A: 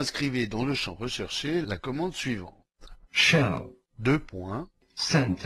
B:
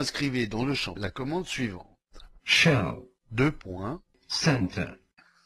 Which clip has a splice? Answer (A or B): B